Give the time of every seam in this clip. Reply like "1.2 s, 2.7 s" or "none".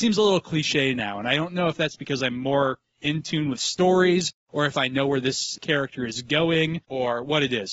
none